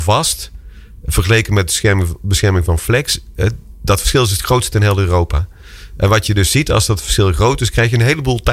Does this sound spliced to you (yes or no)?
no